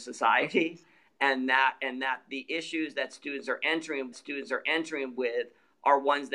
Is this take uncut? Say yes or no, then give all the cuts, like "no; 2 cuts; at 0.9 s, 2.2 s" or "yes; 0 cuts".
no; 1 cut; at 4.1 s